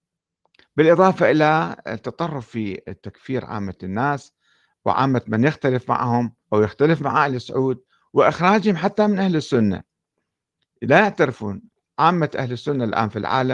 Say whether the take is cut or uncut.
cut